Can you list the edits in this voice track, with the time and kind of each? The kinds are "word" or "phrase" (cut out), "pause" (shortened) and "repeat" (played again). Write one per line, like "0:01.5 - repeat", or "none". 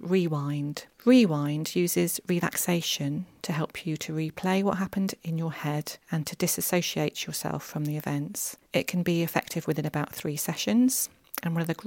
0:00.9 - pause
0:06.0 - pause
0:08.6 - pause